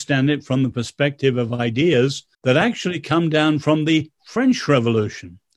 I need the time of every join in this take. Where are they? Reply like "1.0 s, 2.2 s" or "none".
2.3 s